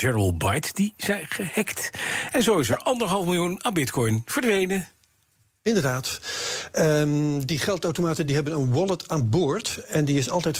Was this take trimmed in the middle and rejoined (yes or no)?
no